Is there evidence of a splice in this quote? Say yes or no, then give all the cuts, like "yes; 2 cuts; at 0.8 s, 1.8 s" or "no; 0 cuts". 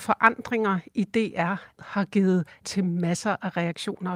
yes; 2 cuts; at 1.8 s, 2.6 s